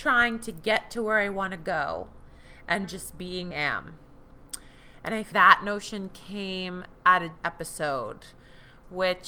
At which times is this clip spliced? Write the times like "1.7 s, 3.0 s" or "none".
2.8 s, 3.5 s, 5.3 s, 7.4 s